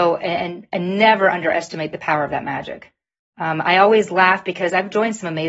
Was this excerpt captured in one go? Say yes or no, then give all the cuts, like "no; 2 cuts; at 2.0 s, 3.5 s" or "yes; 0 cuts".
yes; 0 cuts